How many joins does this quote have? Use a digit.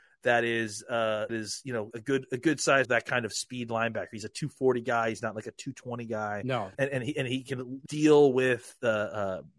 5